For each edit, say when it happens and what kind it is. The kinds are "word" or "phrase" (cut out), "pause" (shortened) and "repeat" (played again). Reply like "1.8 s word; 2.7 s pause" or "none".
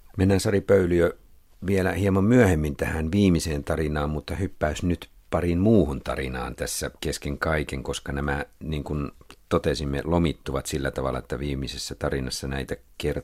7.0 s pause